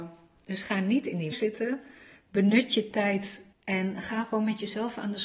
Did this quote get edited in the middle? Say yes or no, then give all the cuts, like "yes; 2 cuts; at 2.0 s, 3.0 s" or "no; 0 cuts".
yes; 2 cuts; at 1.3 s, 3.5 s